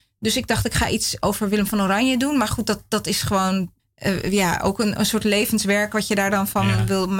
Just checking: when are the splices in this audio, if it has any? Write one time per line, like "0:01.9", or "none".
0:03.8